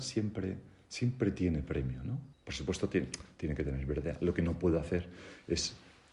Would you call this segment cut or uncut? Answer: cut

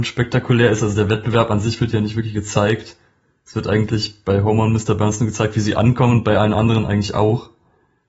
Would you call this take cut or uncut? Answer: uncut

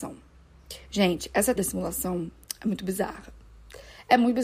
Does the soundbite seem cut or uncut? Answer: cut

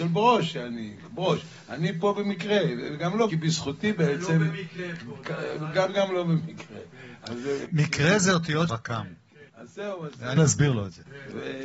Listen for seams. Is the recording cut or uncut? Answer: cut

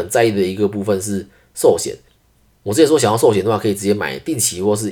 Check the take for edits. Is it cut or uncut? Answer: uncut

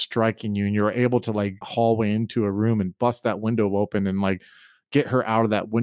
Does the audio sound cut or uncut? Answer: cut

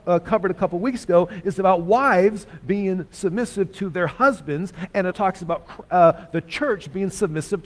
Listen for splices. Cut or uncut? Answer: cut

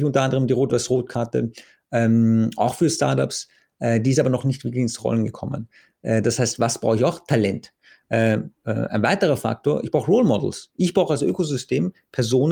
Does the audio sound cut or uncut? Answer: uncut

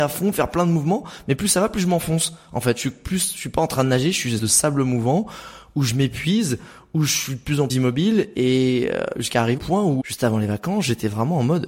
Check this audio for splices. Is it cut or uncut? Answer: cut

